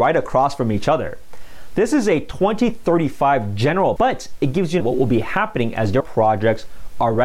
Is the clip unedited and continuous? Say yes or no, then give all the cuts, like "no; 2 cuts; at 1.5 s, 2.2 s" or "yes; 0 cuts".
no; 3 cuts; at 4.0 s, 4.8 s, 6.0 s